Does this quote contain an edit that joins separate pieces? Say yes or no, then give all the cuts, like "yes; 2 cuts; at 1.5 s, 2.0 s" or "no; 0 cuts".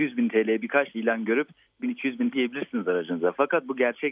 yes; 3 cuts; at 0.9 s, 1.8 s, 2.3 s